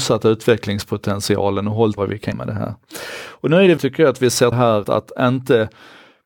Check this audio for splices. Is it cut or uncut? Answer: cut